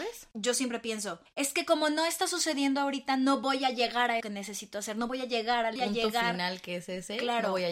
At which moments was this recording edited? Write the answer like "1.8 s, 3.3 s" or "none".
1.3 s, 4.2 s, 5.8 s